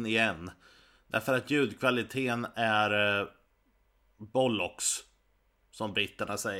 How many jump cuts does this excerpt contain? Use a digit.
0